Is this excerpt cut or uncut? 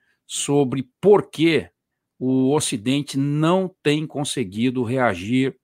uncut